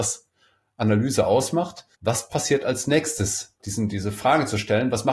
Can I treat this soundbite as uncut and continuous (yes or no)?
no